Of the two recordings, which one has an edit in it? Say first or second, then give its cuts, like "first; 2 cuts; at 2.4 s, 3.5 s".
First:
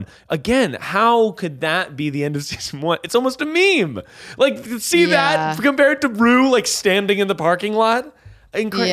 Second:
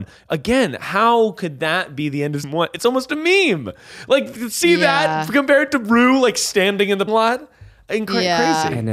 second; 2 cuts; at 2.4 s, 7.1 s